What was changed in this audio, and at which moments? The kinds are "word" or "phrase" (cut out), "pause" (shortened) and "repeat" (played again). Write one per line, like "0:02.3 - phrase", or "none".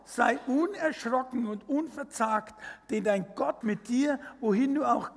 0:03.6 - word